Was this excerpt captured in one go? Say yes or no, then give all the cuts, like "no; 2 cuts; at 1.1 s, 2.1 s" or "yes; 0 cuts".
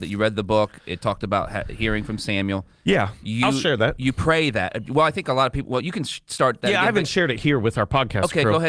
yes; 0 cuts